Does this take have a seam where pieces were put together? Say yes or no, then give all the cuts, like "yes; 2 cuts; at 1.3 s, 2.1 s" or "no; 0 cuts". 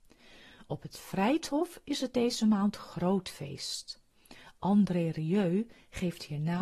no; 0 cuts